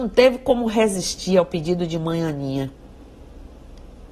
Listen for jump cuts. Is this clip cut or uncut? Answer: uncut